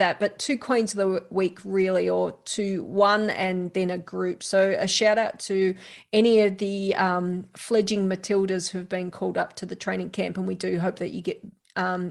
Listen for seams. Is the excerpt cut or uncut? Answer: uncut